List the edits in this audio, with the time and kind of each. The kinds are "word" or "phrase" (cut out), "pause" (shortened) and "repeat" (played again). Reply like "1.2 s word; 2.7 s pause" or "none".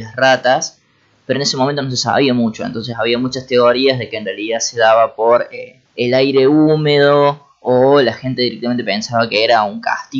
5.9 s pause